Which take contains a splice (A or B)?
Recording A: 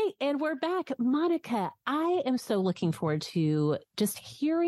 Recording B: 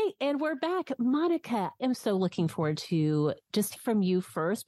B